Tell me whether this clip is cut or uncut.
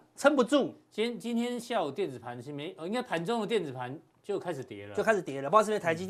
uncut